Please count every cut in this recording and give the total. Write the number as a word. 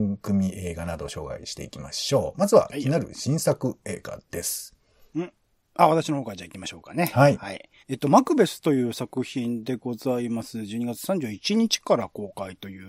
two